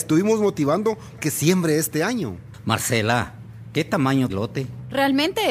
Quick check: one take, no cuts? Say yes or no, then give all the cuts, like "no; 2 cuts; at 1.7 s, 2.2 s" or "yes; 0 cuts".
no; 2 cuts; at 1.2 s, 4.3 s